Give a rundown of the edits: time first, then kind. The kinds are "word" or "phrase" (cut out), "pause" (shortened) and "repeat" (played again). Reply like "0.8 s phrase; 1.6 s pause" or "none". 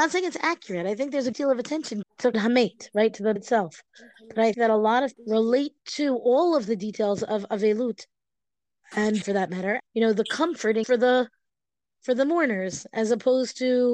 1.3 s word; 2.0 s word; 2.3 s word; 3.4 s word; 4.5 s word; 5.1 s word; 9.2 s word; 9.8 s word; 10.8 s word